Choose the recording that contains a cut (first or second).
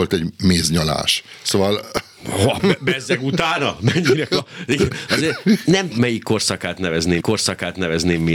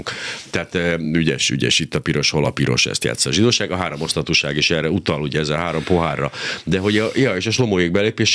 first